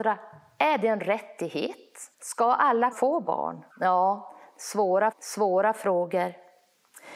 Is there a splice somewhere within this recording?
yes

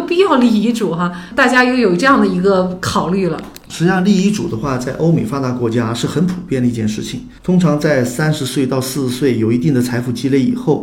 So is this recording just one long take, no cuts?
no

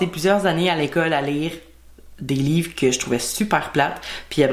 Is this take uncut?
yes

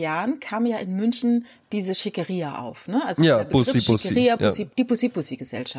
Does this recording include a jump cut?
no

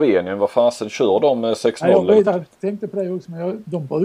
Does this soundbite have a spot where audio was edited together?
yes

